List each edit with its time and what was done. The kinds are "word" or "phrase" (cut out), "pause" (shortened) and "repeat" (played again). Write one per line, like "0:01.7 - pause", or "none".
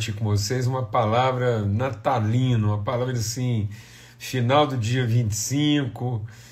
0:03.1 - phrase

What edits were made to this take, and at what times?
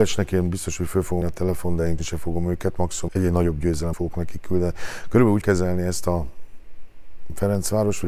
0:01.2 - word
0:02.0 - word
0:03.1 - word
0:03.9 - phrase
0:05.4 - word

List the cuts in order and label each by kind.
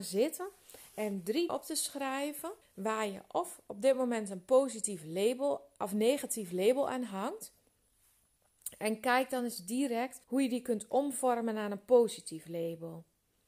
0:01.5 - word
0:02.6 - pause
0:10.2 - pause

